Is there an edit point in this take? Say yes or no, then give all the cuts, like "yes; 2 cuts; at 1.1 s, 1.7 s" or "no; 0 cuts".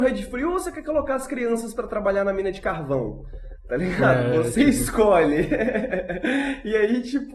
no; 0 cuts